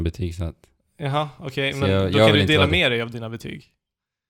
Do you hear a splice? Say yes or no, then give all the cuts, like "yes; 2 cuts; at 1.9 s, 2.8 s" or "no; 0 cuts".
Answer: no; 0 cuts